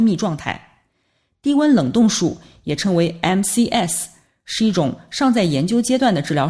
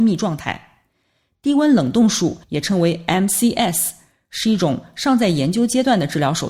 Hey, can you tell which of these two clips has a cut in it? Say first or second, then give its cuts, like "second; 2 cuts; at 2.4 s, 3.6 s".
second; 1 cut; at 2.4 s